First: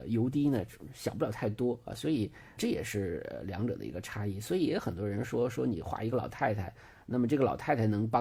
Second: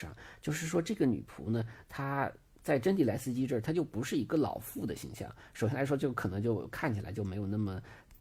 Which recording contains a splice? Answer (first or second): first